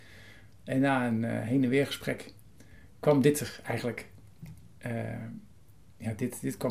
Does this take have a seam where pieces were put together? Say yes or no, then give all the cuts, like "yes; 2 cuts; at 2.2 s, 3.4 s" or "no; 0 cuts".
no; 0 cuts